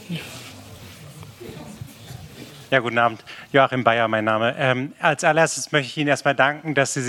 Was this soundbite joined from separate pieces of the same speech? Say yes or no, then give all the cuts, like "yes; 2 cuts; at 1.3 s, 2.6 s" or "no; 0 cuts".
yes; 1 cut; at 2.7 s